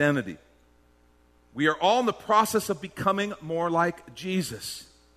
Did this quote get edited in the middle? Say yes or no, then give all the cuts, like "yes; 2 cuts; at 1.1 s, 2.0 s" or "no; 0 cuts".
no; 0 cuts